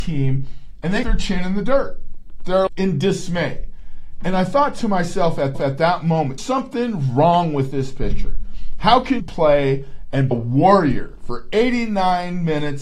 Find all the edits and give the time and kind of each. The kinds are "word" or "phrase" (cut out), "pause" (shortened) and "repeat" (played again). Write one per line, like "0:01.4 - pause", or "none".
0:01.0 - word
0:02.7 - word
0:05.5 - repeat
0:06.4 - word
0:09.2 - word
0:10.3 - phrase

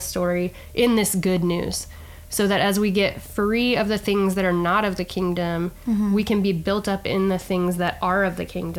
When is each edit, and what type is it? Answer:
none

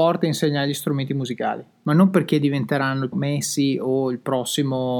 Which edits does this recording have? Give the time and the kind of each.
0:03.1 - word

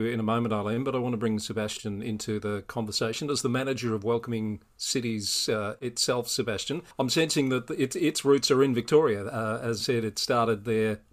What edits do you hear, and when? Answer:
0:06.9 - pause
0:09.8 - word

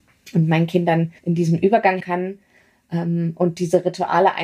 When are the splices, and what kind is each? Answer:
0:01.2 - pause
0:02.0 - word

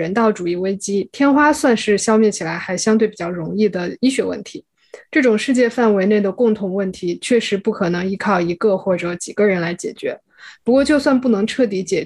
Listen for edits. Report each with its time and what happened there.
none

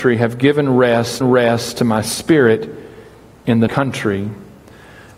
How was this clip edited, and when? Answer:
0:01.2 - repeat
0:03.7 - word

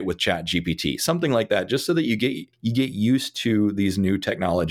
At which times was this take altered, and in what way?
0:02.5 - pause

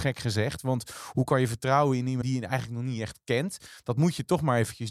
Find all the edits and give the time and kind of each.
0:02.2 - word

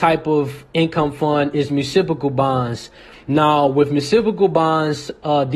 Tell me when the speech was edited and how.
none

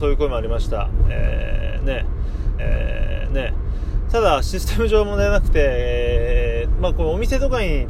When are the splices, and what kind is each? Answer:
0:02.6 - repeat

